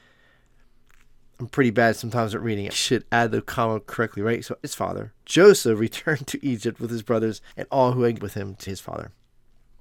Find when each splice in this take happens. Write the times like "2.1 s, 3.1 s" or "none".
2.7 s, 4.6 s, 5.2 s, 7.5 s, 8.2 s, 8.7 s